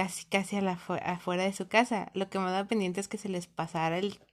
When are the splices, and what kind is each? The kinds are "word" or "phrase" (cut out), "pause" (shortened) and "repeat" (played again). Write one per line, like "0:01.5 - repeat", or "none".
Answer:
none